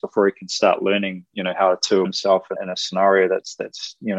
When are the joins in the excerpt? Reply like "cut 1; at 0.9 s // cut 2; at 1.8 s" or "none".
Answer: cut 1; at 2.0 s // cut 2; at 2.5 s

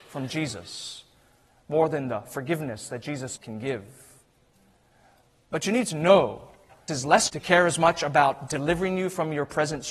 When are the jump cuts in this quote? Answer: cut 1; at 3.4 s // cut 2; at 6.9 s // cut 3; at 7.3 s

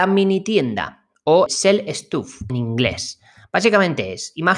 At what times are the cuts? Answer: cut 1; at 1.5 s // cut 2; at 2.5 s

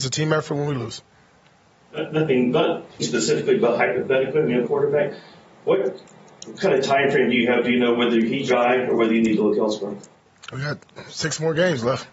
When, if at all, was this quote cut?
cut 1; at 3.0 s // cut 2; at 4.6 s // cut 3; at 8.5 s // cut 4; at 10.5 s

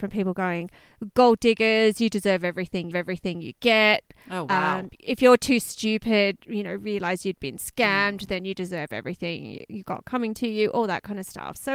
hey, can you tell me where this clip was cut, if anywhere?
cut 1; at 2.9 s // cut 2; at 6.4 s

